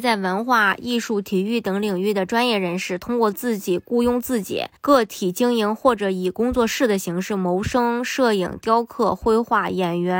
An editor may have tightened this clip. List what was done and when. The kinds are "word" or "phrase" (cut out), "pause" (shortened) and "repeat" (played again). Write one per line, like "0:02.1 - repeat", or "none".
0:04.8 - pause

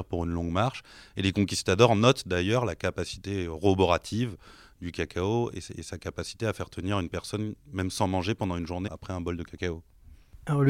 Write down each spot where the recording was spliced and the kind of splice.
0:08.9 - word

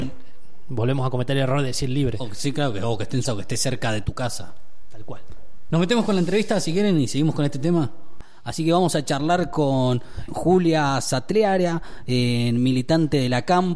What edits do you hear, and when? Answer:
0:03.2 - word
0:05.7 - word
0:10.3 - word

